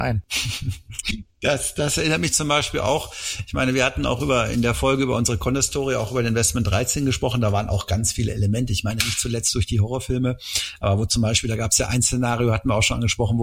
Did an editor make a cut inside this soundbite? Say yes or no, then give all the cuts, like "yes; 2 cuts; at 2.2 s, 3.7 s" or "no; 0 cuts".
no; 0 cuts